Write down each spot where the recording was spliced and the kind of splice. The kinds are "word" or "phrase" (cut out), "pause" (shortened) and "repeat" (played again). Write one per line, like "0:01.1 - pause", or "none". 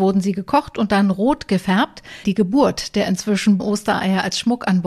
0:02.2 - word
0:03.6 - word